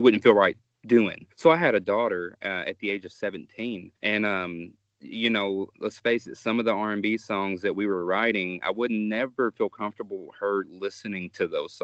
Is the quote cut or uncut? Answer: cut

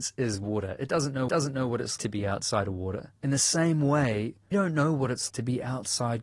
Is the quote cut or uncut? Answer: cut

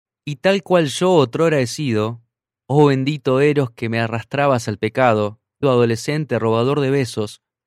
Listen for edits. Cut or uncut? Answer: cut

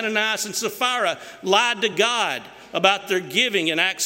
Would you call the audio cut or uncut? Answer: uncut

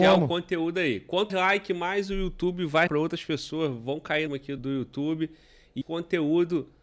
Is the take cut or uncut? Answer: cut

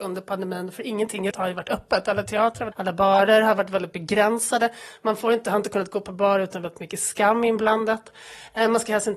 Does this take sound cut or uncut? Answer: cut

